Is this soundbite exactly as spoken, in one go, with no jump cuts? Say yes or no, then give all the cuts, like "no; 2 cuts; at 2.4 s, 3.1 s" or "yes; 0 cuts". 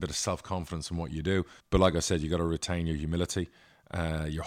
no; 1 cut; at 1.6 s